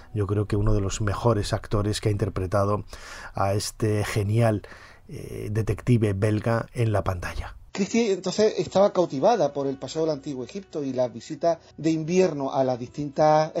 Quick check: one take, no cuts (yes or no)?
no